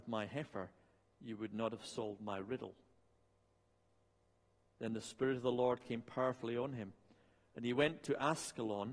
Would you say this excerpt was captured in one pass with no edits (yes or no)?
yes